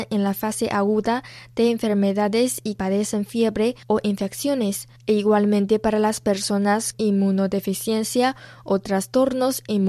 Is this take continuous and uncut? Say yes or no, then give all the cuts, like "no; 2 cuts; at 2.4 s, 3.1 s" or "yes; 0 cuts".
no; 4 cuts; at 2.8 s, 3.8 s, 5.0 s, 6.9 s